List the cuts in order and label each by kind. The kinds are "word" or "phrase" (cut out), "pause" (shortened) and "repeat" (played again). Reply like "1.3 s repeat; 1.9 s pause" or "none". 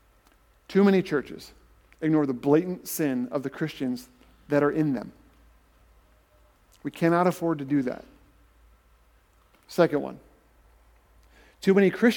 none

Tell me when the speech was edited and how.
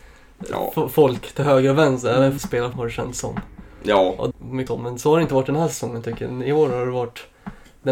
2.4 s phrase; 2.7 s word; 4.3 s word; 4.7 s phrase

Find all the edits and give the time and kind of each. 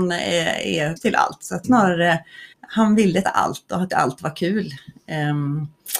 1.0 s word; 1.6 s word; 2.5 s pause; 3.2 s word; 3.9 s word

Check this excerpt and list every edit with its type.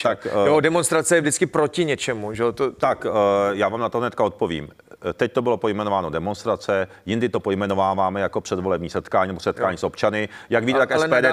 none

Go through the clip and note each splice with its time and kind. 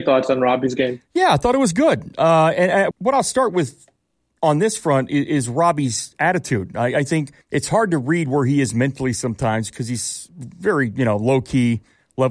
2.9 s word; 7.4 s pause

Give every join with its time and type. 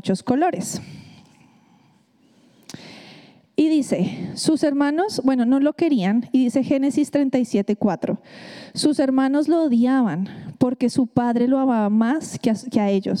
none

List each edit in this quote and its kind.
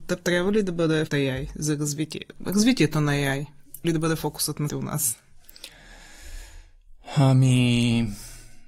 1.1 s word; 3.8 s word; 4.7 s word

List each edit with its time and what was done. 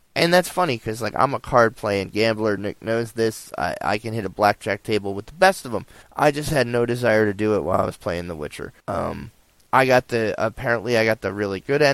6.0 s pause; 8.8 s pause

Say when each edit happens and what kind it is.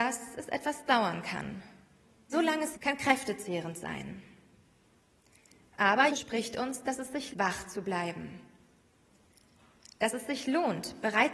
2.3 s word; 2.7 s word; 6.1 s word; 7.3 s word

